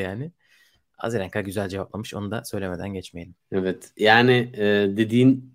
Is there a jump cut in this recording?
yes; 1 cut; at 3.4 s

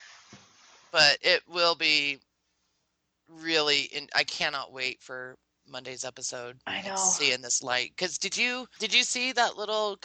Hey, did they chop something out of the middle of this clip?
no; 0 cuts

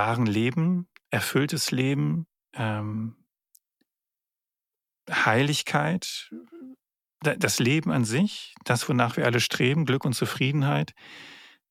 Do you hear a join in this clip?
no; 0 cuts

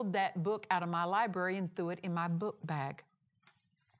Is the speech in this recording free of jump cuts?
yes; 0 cuts

